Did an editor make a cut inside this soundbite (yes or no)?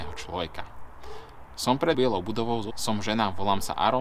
yes